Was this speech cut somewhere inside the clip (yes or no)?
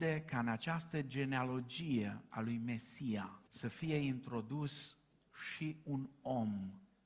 yes